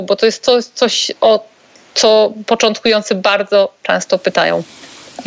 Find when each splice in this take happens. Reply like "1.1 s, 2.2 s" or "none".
none